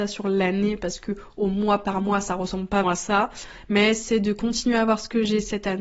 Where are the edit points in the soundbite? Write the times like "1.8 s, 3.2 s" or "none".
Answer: 2.8 s